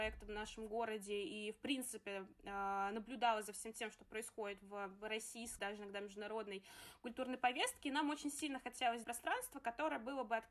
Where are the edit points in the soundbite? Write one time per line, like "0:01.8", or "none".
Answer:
0:05.6
0:09.0